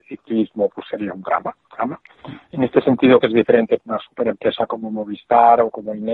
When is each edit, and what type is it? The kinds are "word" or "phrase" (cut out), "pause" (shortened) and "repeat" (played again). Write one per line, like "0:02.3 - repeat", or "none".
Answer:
0:01.6 - word
0:03.2 - word
0:03.8 - word